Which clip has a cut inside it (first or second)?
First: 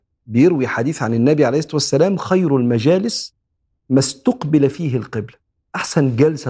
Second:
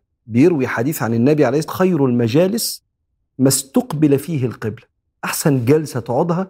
second